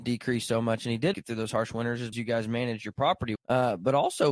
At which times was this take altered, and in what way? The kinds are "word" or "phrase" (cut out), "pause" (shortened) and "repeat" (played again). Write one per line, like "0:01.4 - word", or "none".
0:01.1 - word
0:02.1 - word
0:03.4 - word